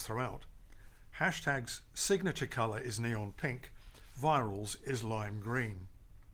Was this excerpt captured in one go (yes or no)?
yes